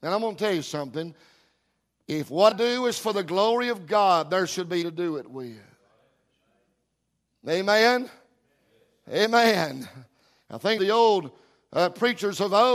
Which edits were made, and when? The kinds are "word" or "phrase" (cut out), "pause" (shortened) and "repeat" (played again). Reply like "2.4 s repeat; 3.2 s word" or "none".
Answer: 2.5 s word; 4.8 s word; 10.8 s phrase